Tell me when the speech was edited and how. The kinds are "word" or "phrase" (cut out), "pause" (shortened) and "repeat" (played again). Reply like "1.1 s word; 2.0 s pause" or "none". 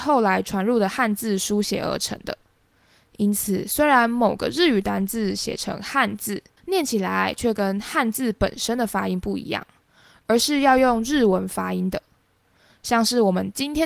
6.6 s pause